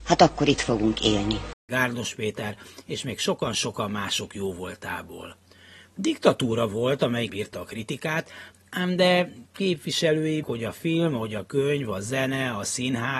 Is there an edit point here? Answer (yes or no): yes